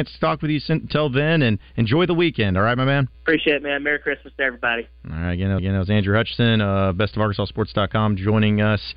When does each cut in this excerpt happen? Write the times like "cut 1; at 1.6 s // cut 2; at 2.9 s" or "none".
cut 1; at 1.7 s // cut 2; at 3.1 s // cut 3; at 5.6 s